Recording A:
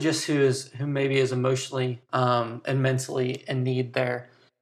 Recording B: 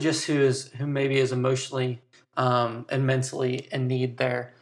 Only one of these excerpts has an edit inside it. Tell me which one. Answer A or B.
A